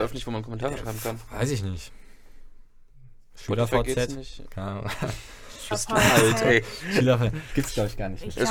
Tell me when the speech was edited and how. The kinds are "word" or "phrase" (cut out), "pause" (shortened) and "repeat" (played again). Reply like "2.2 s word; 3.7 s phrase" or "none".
5.7 s word

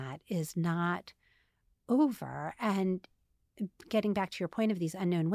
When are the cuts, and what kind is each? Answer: none

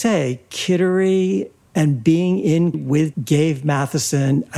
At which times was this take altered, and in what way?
2.7 s word; 3.1 s word

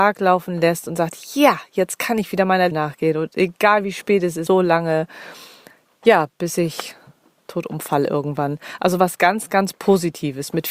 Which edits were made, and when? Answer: 2.7 s word; 4.5 s phrase

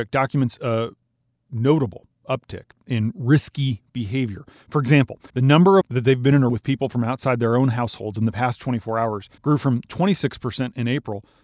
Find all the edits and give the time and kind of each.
5.3 s pause; 5.8 s phrase; 6.5 s word; 9.4 s pause

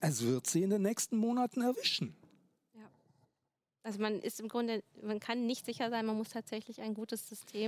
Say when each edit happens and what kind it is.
none

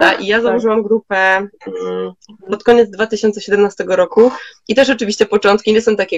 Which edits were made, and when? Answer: none

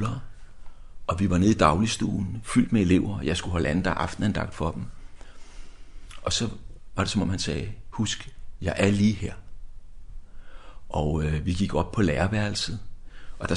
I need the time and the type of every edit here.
none

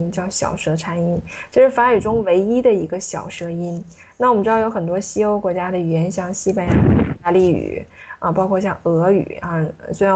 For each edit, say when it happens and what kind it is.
none

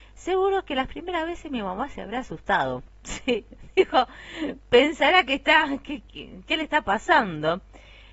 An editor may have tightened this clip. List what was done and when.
none

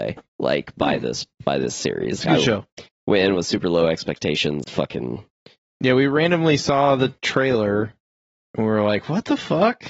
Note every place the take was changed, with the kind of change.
2.2 s word; 4.6 s phrase

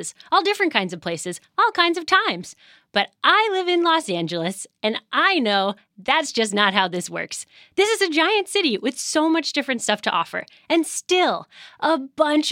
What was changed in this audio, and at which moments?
none

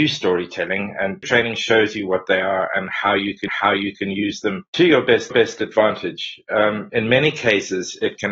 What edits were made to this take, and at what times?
1.2 s word; 3.5 s repeat; 4.7 s pause; 5.3 s repeat

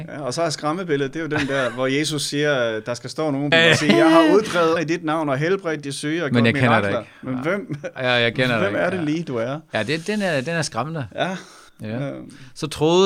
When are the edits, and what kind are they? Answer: 3.5 s phrase; 4.8 s phrase; 11.7 s pause

